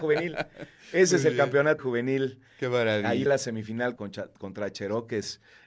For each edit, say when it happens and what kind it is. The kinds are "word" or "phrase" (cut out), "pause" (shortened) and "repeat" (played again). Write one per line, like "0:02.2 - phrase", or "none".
0:01.8 - word
0:03.3 - word
0:04.0 - word